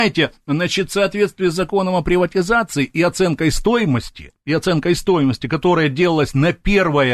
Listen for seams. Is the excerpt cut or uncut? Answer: uncut